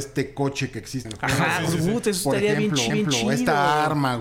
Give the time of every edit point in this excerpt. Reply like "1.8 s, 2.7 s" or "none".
1.0 s, 2.9 s